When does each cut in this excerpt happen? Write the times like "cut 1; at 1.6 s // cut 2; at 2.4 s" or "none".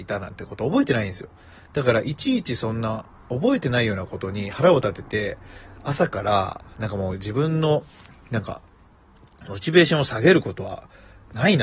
none